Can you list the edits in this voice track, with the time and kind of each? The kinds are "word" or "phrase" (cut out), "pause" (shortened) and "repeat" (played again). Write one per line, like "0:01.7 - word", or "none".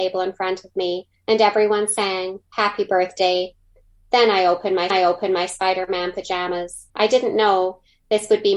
0:01.1 - pause
0:04.9 - repeat
0:06.9 - pause